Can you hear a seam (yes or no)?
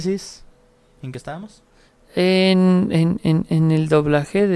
no